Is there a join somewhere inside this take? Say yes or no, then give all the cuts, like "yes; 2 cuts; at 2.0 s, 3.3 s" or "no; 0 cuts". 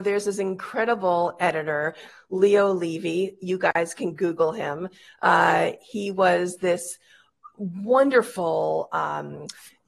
no; 0 cuts